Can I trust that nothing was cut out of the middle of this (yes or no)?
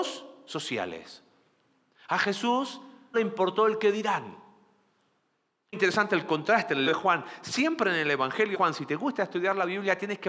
no